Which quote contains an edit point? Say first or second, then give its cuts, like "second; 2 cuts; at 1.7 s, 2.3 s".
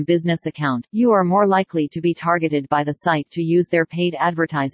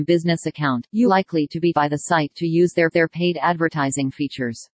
second; 3 cuts; at 1.1 s, 1.7 s, 2.9 s